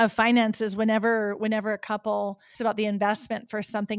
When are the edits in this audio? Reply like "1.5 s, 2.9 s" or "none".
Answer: 2.5 s